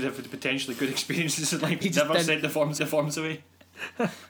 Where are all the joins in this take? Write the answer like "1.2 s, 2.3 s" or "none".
1.8 s, 2.8 s